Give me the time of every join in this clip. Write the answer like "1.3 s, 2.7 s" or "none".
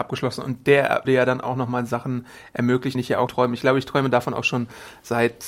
1.0 s, 2.9 s, 3.3 s